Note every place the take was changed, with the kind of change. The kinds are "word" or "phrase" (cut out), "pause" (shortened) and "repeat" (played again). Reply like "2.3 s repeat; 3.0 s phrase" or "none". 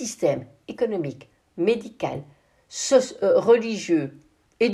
1.5 s word